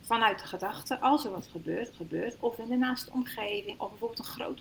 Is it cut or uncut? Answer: cut